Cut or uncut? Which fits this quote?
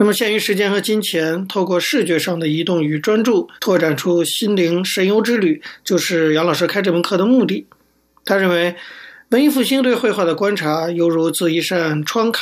cut